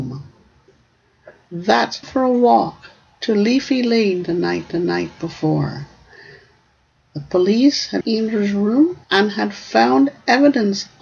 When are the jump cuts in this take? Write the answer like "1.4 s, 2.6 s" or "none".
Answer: 2.0 s, 4.7 s, 8.0 s, 9.0 s